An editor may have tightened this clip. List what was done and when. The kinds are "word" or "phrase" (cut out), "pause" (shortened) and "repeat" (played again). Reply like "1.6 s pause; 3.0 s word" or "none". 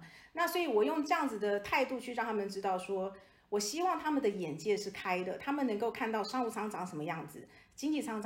none